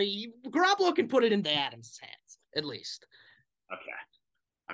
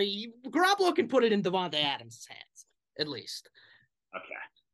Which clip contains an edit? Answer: first; 2 cuts; at 1.4 s, 2.5 s

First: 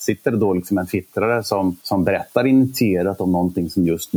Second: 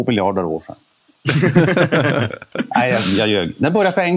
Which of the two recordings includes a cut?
first; 1 cut; at 1.8 s

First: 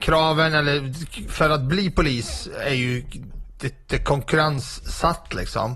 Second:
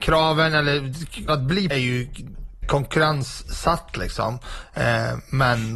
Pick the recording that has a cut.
second; 3 cuts; at 1.3 s, 1.7 s, 2.6 s

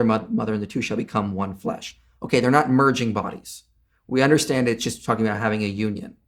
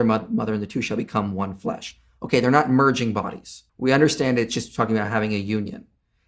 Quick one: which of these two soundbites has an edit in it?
second; 1 cut; at 3.7 s

